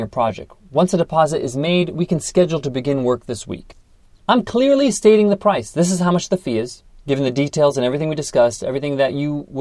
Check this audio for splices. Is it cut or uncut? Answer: uncut